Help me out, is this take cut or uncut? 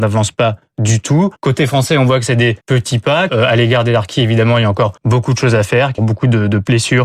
cut